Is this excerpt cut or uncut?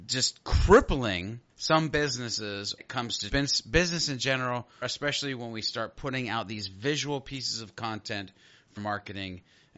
cut